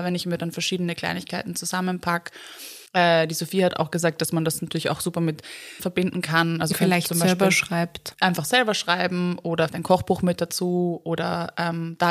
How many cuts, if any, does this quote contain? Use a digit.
5